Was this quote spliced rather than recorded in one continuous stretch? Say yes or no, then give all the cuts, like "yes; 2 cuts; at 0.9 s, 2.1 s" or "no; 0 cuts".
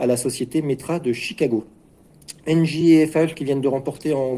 no; 0 cuts